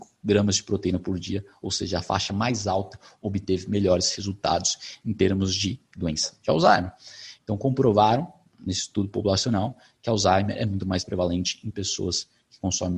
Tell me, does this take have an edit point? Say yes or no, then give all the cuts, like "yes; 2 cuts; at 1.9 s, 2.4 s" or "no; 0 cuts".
no; 0 cuts